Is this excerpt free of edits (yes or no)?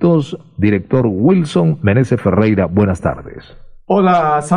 yes